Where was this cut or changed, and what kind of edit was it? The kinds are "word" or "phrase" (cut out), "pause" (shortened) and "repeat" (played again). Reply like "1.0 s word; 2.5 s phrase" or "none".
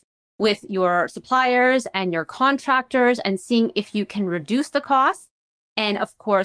none